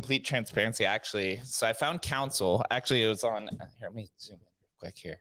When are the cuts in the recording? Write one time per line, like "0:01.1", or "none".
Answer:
0:04.1